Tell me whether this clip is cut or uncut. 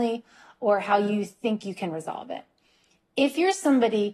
uncut